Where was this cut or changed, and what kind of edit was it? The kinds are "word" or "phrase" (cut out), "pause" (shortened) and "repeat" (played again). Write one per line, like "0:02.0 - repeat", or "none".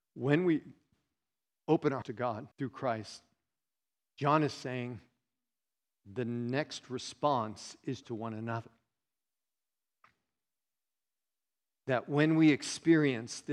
0:02.0 - word
0:02.5 - pause
0:03.8 - pause
0:06.0 - word
0:08.0 - phrase